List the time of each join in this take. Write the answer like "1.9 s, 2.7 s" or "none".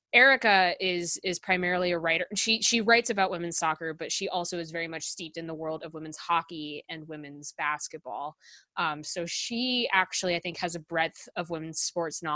none